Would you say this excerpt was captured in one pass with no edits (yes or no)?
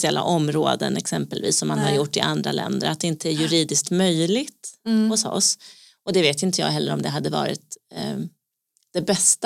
yes